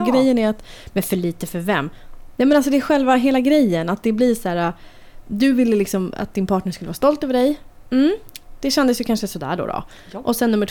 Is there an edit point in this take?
no; 0 cuts

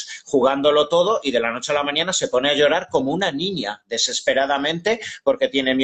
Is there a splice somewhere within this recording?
no; 0 cuts

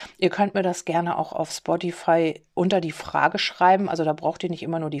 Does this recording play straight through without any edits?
yes; 0 cuts

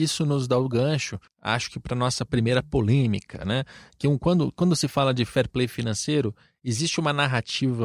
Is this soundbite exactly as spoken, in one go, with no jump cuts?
no; 1 cut; at 1.3 s

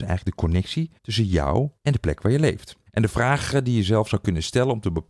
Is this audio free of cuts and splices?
no; 3 cuts; at 1.0 s, 1.8 s, 2.9 s

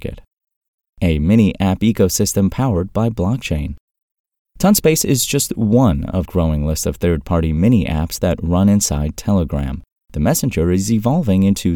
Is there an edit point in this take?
yes; 1 cut; at 6.2 s

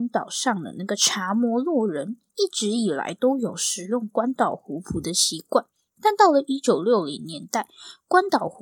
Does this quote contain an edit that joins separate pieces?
no; 0 cuts

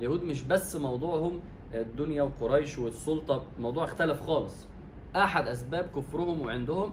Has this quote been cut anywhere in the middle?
no; 0 cuts

